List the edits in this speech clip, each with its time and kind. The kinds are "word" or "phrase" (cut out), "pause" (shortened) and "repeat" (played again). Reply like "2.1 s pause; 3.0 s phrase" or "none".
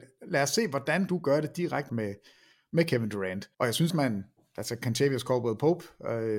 1.1 s word; 1.9 s phrase; 3.5 s pause; 3.9 s word